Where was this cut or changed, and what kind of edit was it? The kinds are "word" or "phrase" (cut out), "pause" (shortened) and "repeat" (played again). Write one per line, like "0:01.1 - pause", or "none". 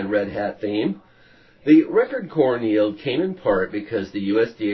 none